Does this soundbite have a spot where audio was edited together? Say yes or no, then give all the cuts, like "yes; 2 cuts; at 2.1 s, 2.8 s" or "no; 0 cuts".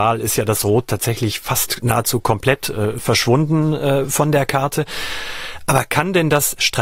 no; 0 cuts